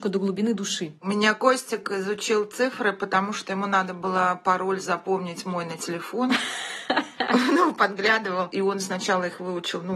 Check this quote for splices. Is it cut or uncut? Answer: uncut